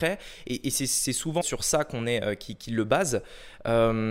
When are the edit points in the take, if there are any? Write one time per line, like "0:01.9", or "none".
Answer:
0:01.4